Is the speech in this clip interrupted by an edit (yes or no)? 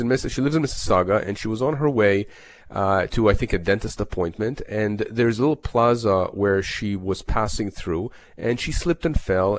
yes